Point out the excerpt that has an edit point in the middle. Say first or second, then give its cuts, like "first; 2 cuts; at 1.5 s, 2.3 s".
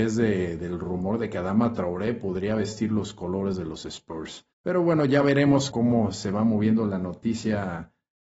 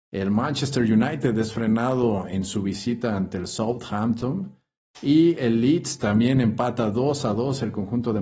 first; 2 cuts; at 4.5 s, 5.7 s